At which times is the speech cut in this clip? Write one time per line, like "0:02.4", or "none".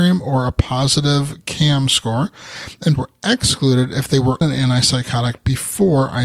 0:03.0
0:04.4